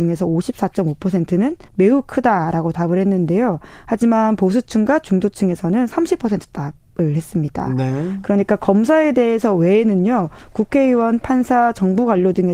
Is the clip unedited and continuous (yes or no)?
no